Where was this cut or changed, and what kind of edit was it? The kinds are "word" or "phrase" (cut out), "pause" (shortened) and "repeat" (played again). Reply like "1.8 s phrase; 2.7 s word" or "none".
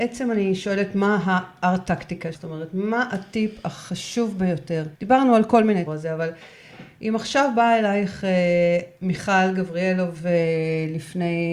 2.3 s word; 4.9 s pause; 5.9 s phrase